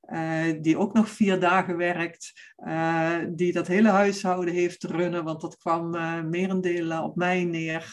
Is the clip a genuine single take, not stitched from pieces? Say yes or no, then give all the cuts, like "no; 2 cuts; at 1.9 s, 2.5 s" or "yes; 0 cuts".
yes; 0 cuts